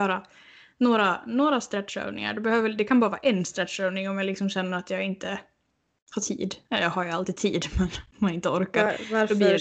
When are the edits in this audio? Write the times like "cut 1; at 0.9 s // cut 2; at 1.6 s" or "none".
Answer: none